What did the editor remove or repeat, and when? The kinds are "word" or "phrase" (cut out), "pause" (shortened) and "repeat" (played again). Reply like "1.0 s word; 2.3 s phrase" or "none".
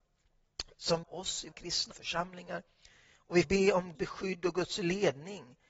1.0 s phrase; 1.5 s word; 1.9 s phrase; 3.4 s word; 3.9 s word

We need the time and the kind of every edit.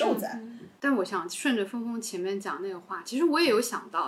none

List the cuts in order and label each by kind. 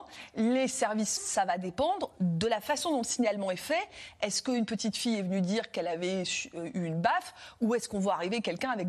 1.2 s word

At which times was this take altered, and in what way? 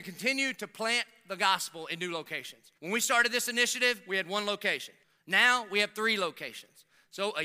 2.8 s pause; 5.0 s pause

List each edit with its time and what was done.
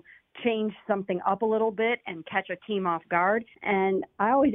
3.5 s pause

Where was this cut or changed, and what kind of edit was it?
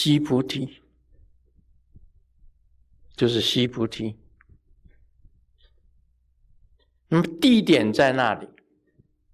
none

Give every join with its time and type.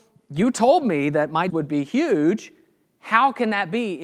1.5 s word

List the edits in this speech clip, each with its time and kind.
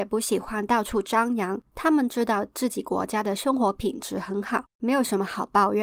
1.7 s pause; 4.7 s pause

